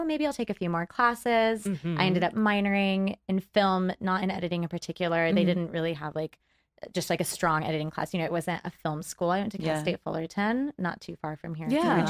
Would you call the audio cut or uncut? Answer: uncut